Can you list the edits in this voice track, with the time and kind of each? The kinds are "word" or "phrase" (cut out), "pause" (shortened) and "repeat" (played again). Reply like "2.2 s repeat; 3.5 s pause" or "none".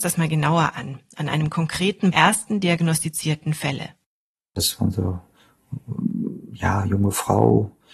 2.1 s phrase